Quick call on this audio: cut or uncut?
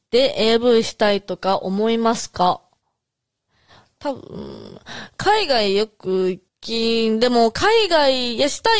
cut